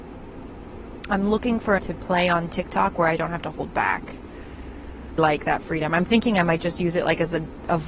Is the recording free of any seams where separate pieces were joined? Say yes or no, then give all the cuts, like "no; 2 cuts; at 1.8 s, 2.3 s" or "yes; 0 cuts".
no; 2 cuts; at 1.8 s, 5.2 s